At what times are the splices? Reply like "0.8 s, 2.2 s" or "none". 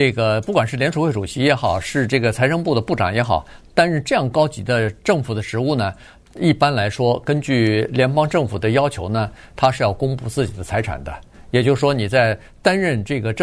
none